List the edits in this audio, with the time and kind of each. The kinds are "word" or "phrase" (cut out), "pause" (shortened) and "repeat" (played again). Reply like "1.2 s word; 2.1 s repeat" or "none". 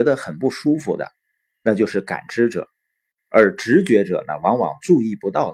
none